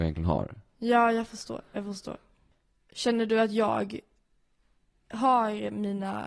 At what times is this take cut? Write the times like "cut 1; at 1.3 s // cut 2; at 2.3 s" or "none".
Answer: none